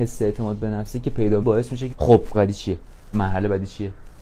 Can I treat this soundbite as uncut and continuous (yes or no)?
no